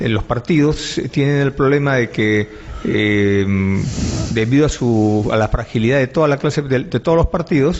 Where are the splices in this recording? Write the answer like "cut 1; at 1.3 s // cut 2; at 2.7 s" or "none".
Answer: none